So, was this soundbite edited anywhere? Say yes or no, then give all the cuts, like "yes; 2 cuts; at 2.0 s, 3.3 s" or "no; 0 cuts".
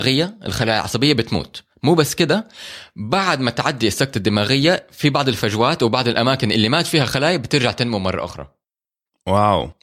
no; 0 cuts